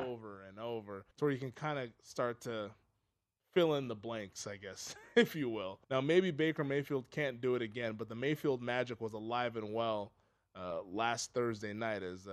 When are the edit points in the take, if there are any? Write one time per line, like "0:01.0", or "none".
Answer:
0:01.1
0:05.8